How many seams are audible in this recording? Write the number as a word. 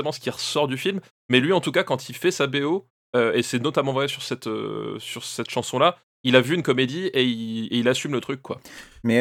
zero